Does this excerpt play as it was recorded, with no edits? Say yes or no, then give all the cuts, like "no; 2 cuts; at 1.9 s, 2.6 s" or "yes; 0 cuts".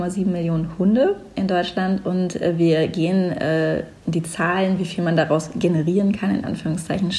no; 1 cut; at 4.0 s